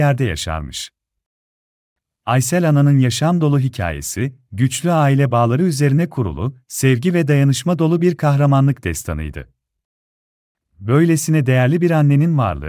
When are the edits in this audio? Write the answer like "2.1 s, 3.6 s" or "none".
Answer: none